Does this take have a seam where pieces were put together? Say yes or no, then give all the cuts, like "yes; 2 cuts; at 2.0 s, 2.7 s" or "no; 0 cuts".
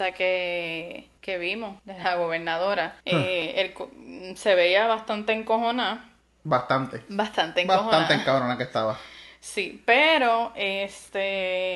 yes; 3 cuts; at 1.2 s, 1.8 s, 3.0 s